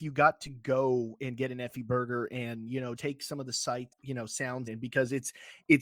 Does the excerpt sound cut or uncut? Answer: cut